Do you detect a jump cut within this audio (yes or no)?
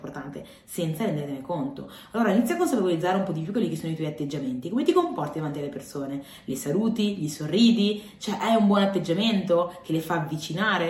no